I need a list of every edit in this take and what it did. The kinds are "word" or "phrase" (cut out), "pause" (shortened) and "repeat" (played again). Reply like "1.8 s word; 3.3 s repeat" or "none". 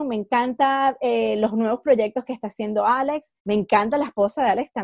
3.4 s pause